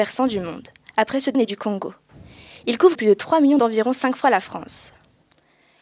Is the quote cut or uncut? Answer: cut